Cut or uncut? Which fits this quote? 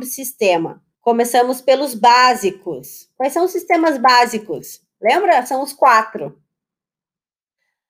cut